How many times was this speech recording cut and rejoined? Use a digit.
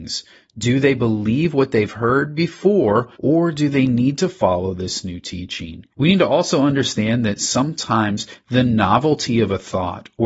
2